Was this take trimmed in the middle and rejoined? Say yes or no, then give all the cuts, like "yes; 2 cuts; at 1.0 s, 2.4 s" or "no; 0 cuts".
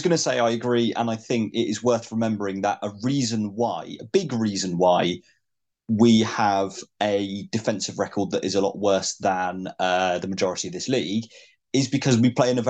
no; 0 cuts